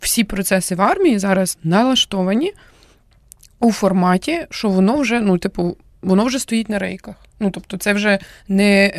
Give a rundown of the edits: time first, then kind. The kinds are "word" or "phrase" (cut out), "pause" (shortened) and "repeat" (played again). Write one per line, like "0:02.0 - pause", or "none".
none